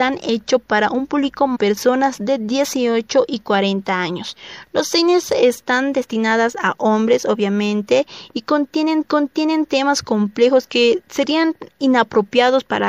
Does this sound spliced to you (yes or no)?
yes